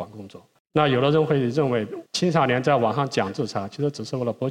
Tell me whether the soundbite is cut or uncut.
cut